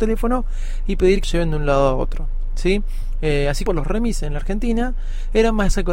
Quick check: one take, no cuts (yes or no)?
no